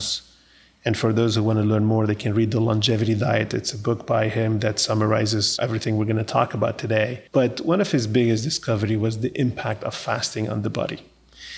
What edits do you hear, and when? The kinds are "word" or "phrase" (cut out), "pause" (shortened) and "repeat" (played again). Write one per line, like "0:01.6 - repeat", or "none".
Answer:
0:07.3 - pause